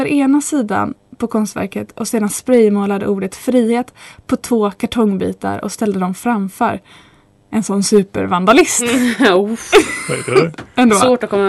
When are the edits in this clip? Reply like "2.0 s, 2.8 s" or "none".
none